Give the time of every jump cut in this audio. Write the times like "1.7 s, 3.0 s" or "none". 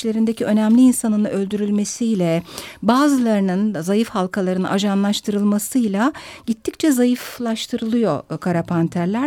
none

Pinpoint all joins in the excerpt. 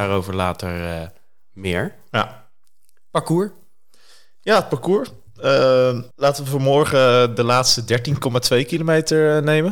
6.1 s

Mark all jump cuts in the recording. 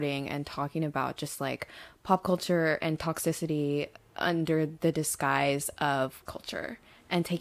4.0 s, 6.3 s

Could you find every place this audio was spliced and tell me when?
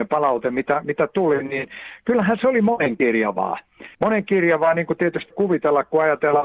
3.9 s, 5.3 s

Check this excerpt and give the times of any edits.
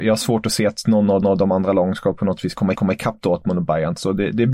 1.2 s, 2.8 s

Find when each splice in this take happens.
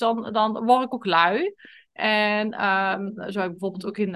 none

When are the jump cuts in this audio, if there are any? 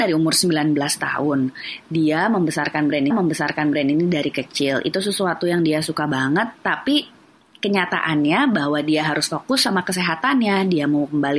3.1 s

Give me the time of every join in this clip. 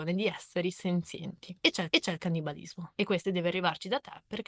1.9 s, 3.2 s

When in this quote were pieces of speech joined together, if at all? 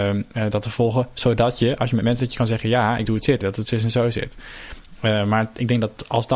2.2 s, 3.1 s, 3.4 s

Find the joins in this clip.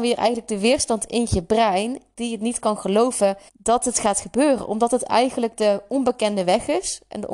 3.5 s

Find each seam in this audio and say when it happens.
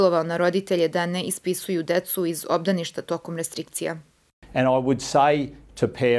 none

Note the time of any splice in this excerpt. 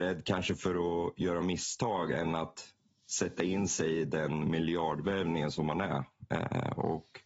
none

